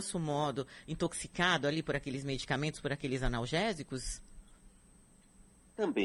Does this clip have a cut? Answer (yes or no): no